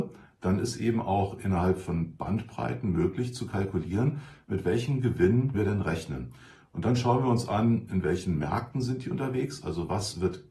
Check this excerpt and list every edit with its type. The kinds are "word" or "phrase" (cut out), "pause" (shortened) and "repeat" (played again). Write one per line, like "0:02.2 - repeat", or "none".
0:05.5 - word